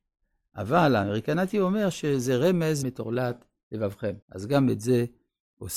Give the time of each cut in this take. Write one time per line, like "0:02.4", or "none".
0:02.8
0:04.2